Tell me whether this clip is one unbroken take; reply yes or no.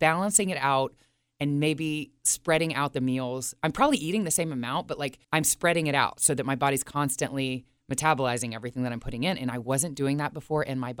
no